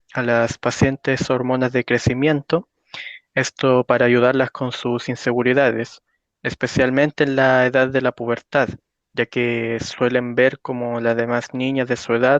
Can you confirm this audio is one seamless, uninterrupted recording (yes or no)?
yes